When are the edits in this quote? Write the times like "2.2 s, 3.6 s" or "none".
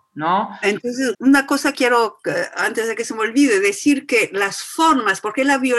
1.1 s, 1.7 s

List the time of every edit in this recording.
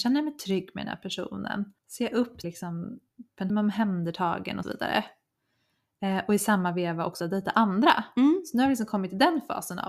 1.8 s, 2.4 s, 3.5 s, 4.6 s, 7.2 s

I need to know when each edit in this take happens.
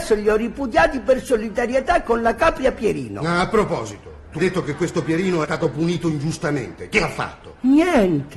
4.4 s, 5.4 s

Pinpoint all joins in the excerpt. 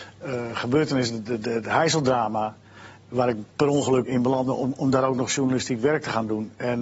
4.1 s

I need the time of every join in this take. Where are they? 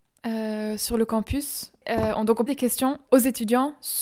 2.5 s

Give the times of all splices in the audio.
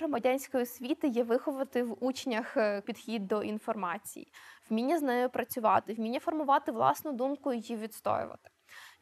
2.8 s

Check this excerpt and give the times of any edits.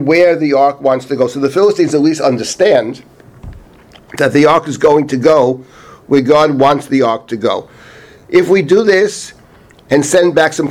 none

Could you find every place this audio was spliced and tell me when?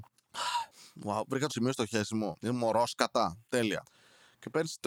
1.5 s

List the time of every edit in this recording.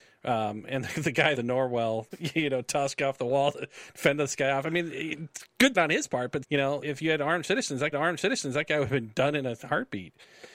1.3 s, 2.1 s, 5.7 s, 6.4 s, 6.8 s, 7.9 s

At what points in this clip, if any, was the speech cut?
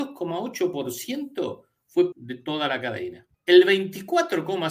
2.1 s, 3.3 s

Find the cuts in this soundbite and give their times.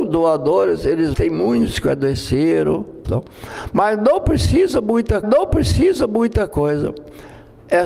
1.1 s, 3.0 s, 5.2 s

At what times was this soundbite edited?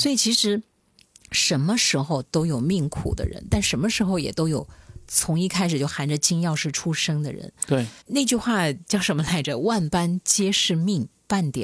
8.0 s

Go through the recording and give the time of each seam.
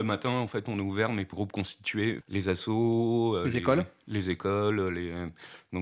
1.3 s, 2.2 s

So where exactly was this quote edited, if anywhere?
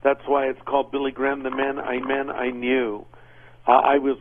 2.0 s

